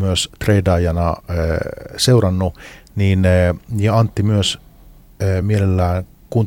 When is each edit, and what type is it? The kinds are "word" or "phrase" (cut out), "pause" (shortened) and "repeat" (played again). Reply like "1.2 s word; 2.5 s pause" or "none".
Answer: none